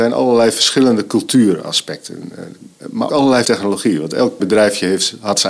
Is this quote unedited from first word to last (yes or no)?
no